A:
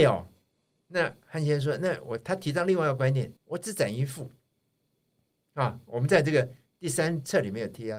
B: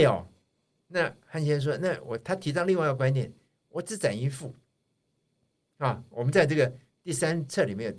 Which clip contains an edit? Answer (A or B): A